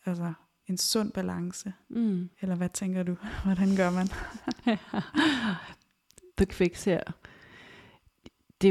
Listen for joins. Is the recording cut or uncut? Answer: cut